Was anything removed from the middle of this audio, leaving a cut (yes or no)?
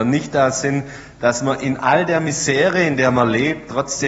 no